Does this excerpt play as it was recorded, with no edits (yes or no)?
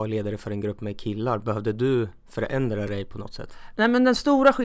yes